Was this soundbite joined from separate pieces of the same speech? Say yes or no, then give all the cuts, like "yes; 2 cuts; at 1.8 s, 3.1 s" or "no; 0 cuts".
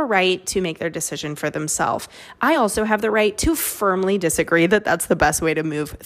no; 0 cuts